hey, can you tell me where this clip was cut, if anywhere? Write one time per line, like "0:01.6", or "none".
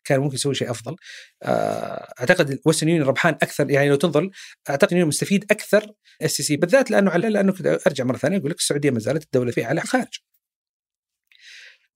0:04.9
0:06.2
0:06.6
0:07.2
0:09.5
0:09.8

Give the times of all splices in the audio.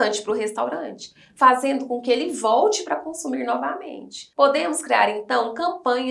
0:04.3

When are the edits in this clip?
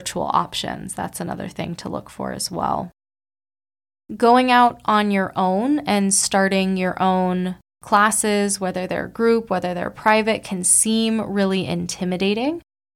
none

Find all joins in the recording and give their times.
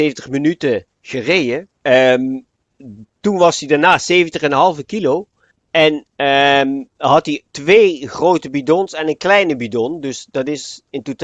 0:01.8
0:05.5
0:07.5

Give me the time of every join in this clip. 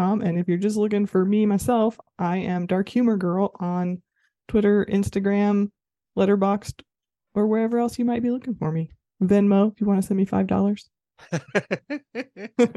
none

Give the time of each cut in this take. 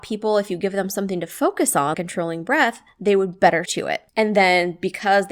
0:01.9
0:03.7
0:04.1

